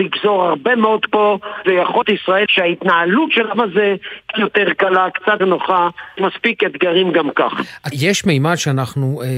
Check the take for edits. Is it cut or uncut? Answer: cut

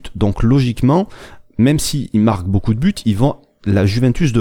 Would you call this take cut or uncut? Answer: uncut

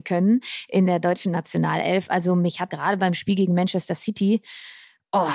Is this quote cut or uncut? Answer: cut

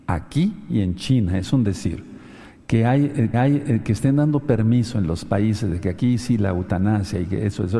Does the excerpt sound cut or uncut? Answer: cut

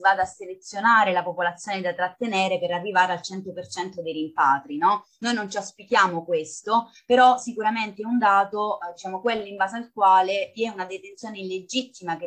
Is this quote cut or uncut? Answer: uncut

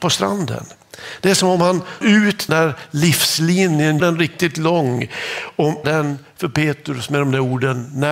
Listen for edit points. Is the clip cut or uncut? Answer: cut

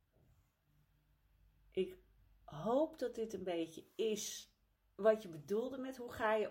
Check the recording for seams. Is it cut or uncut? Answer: uncut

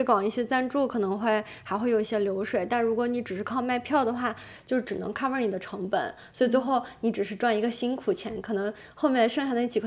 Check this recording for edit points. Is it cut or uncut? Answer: uncut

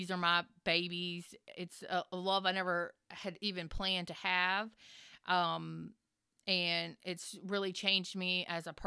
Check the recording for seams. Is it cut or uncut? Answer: uncut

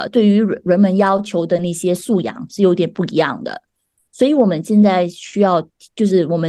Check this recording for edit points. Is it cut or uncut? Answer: uncut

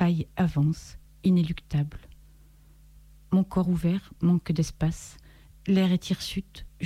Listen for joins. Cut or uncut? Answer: uncut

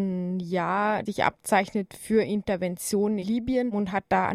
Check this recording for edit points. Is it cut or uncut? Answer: cut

